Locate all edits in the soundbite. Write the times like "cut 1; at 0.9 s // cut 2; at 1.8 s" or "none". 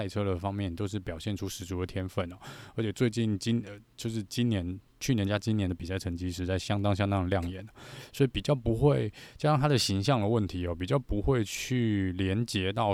cut 1; at 4.9 s